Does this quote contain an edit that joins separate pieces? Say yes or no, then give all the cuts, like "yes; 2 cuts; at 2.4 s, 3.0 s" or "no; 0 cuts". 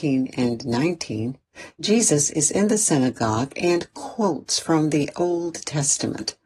no; 0 cuts